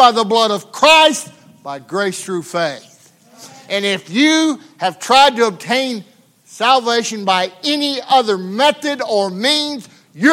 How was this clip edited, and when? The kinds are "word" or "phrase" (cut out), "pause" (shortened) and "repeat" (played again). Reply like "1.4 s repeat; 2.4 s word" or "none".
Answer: none